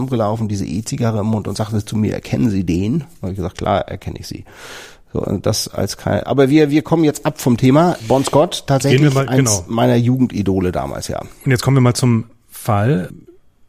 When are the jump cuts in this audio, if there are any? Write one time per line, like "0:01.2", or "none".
none